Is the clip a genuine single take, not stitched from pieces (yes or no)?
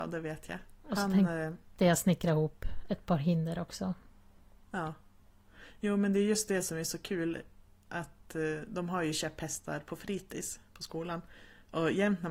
yes